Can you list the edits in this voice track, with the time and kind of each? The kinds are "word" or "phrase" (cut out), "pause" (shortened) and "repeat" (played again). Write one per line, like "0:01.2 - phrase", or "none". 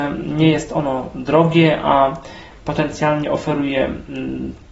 none